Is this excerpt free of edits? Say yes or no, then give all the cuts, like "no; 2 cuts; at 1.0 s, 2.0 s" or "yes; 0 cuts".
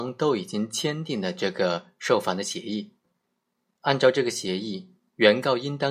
yes; 0 cuts